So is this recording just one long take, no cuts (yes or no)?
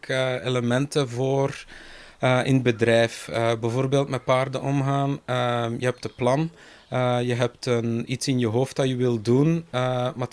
yes